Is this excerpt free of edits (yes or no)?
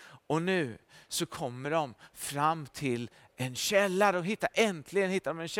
yes